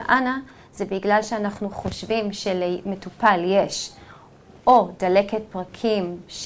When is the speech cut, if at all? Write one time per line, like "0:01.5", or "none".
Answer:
none